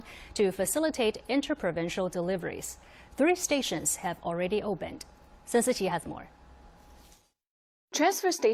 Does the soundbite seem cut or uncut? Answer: uncut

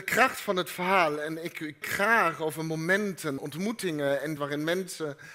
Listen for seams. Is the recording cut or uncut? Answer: cut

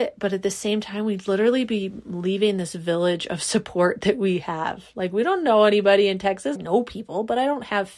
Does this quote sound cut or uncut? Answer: cut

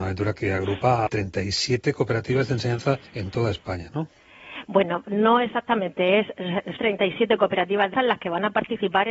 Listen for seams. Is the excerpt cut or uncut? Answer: cut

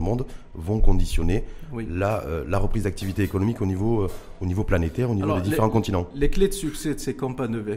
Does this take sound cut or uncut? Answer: uncut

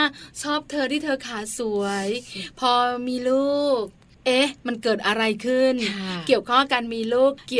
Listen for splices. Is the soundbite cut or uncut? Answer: uncut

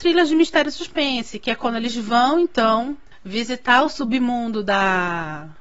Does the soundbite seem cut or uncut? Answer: uncut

